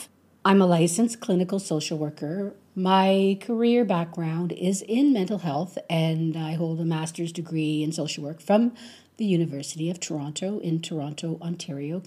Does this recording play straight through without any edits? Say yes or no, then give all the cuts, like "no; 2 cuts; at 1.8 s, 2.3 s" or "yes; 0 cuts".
yes; 0 cuts